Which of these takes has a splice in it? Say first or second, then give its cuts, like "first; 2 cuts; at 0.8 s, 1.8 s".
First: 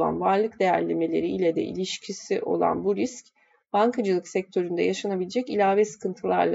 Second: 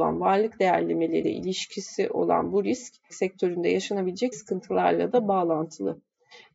second; 3 cuts; at 1.2 s, 3.1 s, 4.3 s